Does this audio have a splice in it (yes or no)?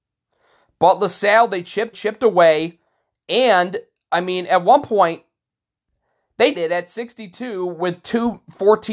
yes